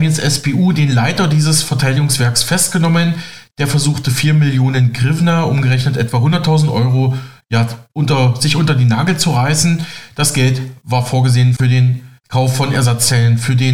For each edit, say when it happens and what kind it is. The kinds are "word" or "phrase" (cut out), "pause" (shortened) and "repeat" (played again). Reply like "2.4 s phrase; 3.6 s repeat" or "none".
12.2 s pause